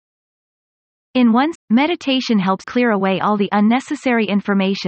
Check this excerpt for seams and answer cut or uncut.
cut